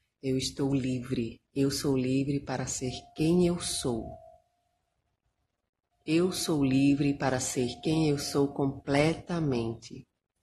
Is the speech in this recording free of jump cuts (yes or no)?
no